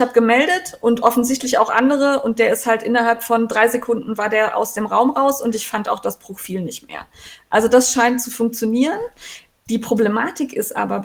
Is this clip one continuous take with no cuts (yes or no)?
yes